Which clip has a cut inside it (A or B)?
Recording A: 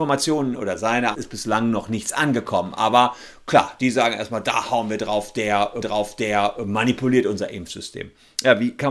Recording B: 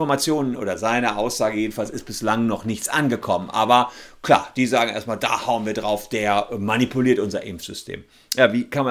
A